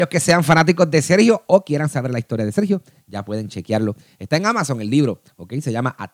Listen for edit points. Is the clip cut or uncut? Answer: uncut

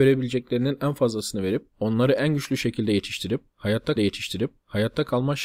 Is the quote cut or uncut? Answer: cut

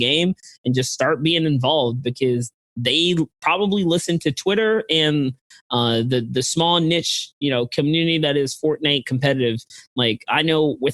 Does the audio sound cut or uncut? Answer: uncut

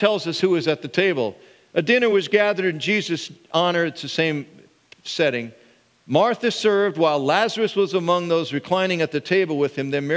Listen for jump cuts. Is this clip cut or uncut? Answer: uncut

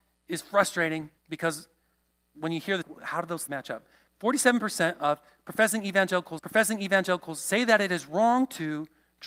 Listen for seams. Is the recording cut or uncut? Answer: cut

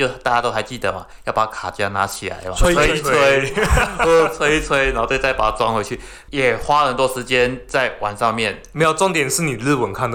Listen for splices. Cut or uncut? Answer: uncut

